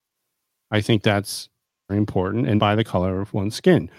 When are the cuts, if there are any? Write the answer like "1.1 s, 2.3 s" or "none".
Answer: 1.9 s, 2.6 s